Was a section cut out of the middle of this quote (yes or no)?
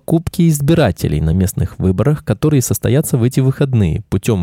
no